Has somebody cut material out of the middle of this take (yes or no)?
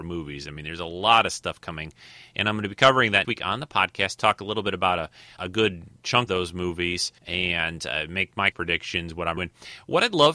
yes